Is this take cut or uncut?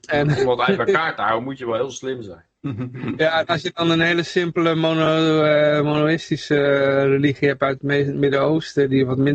uncut